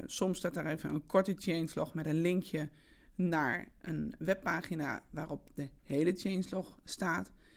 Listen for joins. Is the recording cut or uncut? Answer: uncut